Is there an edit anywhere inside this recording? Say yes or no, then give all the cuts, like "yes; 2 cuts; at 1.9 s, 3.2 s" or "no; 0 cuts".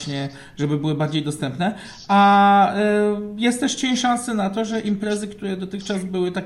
no; 0 cuts